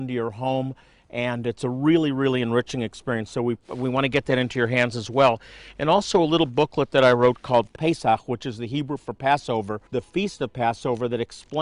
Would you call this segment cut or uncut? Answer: cut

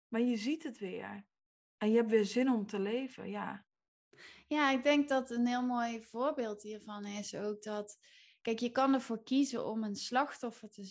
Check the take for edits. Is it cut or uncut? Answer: uncut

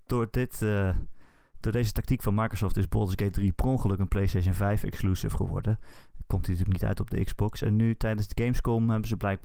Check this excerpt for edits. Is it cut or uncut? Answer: uncut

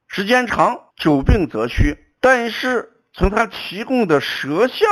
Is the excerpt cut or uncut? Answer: cut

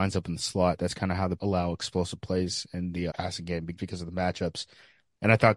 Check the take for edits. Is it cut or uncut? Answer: cut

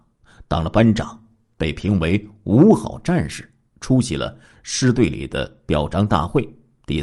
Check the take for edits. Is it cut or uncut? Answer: uncut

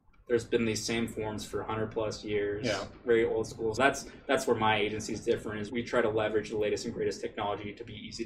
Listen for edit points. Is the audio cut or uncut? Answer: cut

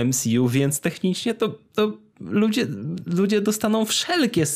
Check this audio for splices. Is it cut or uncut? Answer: uncut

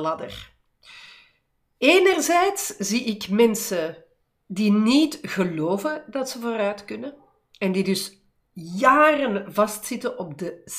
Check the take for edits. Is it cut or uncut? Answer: uncut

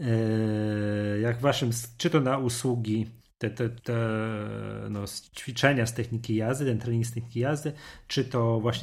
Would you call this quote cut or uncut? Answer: cut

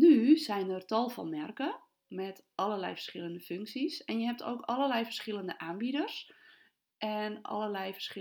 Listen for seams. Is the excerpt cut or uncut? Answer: uncut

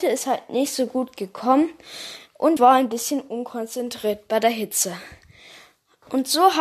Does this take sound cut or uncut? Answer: cut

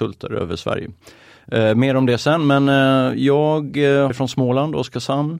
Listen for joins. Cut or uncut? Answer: cut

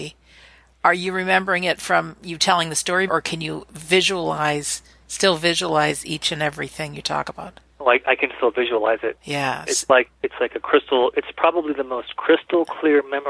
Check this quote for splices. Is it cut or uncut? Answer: cut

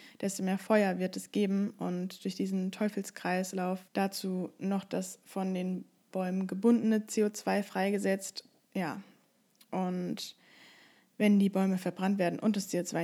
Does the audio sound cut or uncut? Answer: cut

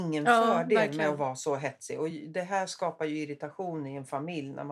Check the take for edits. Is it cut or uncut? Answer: uncut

